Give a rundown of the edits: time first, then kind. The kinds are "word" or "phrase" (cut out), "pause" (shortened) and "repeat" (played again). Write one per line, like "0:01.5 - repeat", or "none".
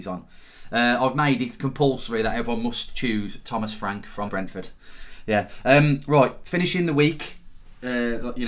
0:04.3 - word